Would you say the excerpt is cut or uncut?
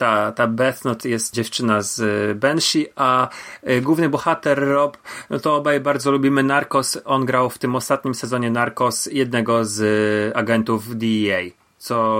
cut